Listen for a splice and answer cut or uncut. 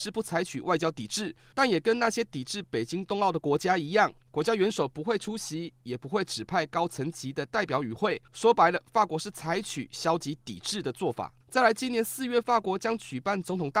cut